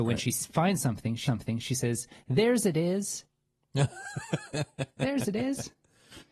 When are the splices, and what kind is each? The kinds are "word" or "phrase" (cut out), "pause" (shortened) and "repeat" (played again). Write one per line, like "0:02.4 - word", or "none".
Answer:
0:01.3 - repeat